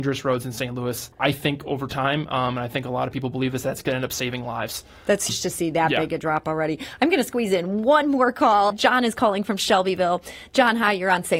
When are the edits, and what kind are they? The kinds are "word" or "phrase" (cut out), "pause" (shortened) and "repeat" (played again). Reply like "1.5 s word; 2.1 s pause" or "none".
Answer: 1.1 s pause; 5.3 s phrase; 8.7 s word